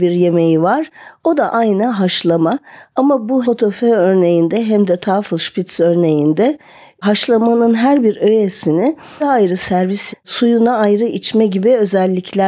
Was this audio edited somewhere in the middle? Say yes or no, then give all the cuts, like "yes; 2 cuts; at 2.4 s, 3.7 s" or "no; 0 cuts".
yes; 4 cuts; at 1.5 s, 3.4 s, 9.2 s, 10.1 s